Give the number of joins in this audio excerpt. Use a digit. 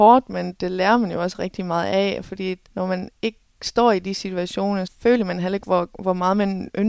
2